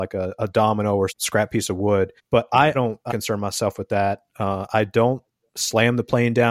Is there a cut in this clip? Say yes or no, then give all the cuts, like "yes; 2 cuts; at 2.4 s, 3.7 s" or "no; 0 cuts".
yes; 4 cuts; at 1.1 s, 2.2 s, 2.7 s, 3.1 s